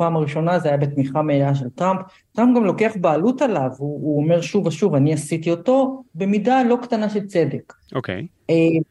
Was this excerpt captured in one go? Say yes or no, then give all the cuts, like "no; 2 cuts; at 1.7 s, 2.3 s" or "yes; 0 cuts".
yes; 0 cuts